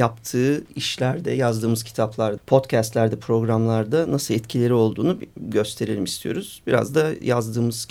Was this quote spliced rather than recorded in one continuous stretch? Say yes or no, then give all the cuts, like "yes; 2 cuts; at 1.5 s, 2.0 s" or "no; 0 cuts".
yes; 1 cut; at 2.4 s